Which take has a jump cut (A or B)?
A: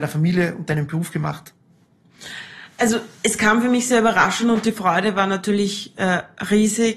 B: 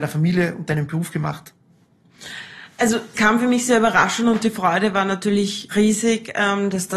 B